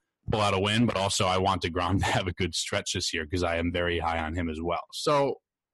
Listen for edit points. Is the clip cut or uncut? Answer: uncut